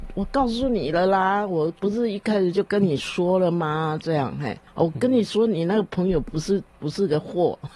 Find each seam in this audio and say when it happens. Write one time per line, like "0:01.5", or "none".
0:04.7

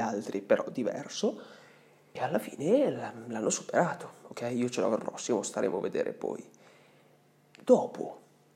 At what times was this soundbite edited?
0:02.2
0:05.0

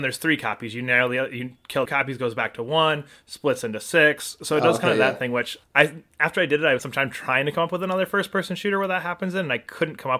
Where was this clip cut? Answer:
0:01.9
0:05.6
0:06.8

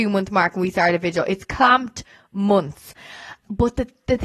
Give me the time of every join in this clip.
none

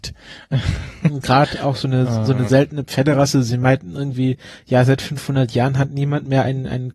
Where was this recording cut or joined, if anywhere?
none

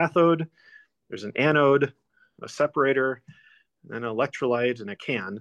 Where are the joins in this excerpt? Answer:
none

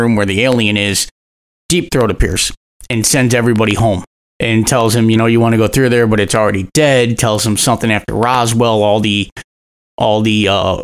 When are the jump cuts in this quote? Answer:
0:04.1
0:05.2

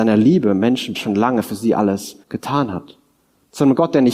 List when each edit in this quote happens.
0:00.9
0:02.2

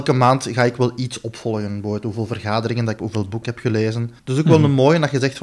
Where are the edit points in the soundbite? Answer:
0:03.0
0:03.4
0:04.2

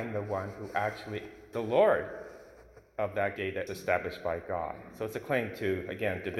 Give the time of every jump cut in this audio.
0:01.5
0:03.4
0:03.7

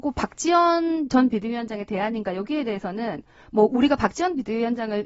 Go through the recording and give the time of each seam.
none

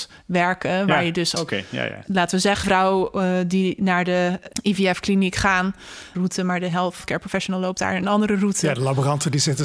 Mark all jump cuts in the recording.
0:01.4
0:02.6
0:06.1

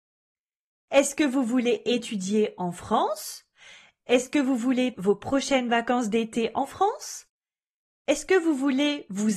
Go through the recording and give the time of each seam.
0:04.9

